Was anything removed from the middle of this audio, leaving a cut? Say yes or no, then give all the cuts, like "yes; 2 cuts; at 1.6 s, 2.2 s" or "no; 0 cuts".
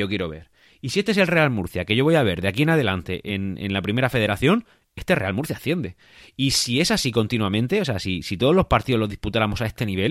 no; 0 cuts